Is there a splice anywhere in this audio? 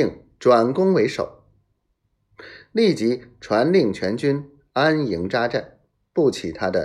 yes; 1 cut; at 5.9 s

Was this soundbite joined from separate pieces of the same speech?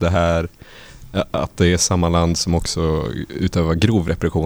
no; 0 cuts

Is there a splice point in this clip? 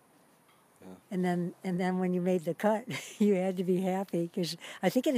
yes; 1 cut; at 1.0 s

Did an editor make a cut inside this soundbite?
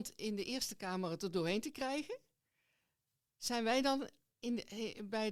no; 0 cuts

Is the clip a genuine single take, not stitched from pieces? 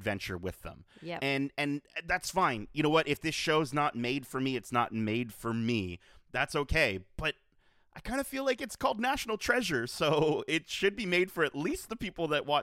yes; 0 cuts

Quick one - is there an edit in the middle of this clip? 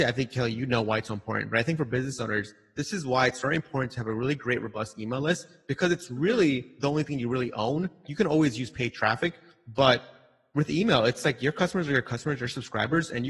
no; 0 cuts

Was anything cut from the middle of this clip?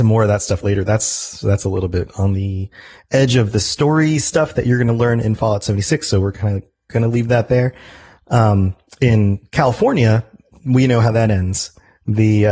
no; 0 cuts

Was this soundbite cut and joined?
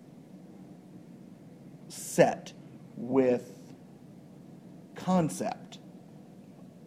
no; 0 cuts

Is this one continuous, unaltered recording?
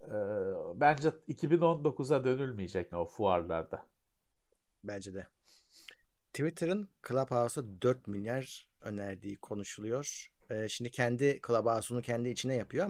no; 4 cuts; at 2.9 s, 6.0 s, 8.8 s, 10.4 s

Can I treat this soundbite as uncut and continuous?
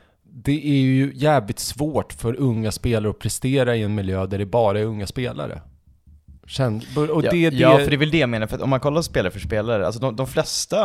no; 1 cut; at 6.4 s

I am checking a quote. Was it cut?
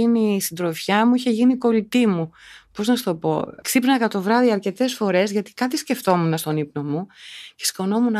no; 0 cuts

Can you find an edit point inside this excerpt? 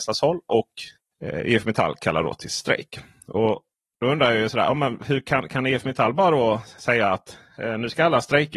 no; 0 cuts

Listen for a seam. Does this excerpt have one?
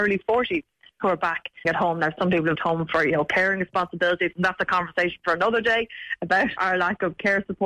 yes; 3 cuts; at 1.6 s, 2.5 s, 6.6 s

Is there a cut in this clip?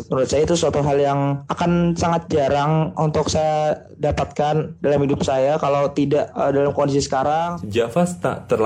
no; 0 cuts

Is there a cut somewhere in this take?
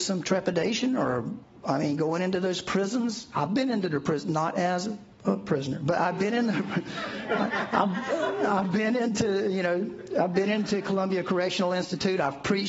no; 0 cuts

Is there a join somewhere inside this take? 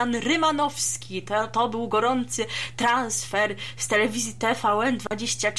no; 0 cuts

